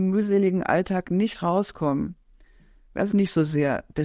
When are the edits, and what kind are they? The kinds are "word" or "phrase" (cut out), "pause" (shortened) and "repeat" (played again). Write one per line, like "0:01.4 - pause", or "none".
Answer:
0:03.1 - word